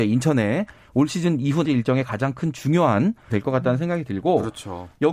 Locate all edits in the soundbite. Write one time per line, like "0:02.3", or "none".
0:01.6
0:03.3